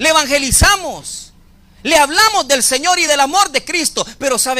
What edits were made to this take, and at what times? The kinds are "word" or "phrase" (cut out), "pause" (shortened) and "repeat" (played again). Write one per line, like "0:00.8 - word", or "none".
none